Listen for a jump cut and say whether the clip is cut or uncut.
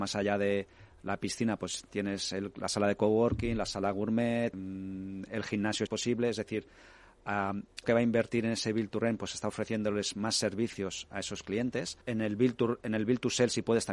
cut